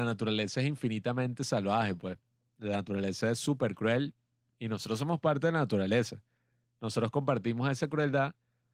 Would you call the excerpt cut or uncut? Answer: uncut